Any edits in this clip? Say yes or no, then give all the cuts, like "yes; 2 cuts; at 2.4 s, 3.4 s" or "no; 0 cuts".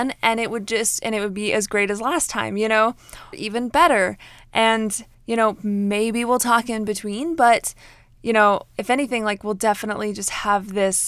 yes; 1 cut; at 3.3 s